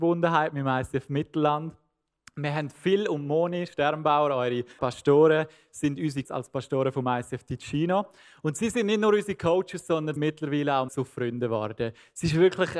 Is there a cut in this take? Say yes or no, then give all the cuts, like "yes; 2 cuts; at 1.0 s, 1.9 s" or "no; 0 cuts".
yes; 4 cuts; at 4.8 s, 6.2 s, 10.2 s, 10.9 s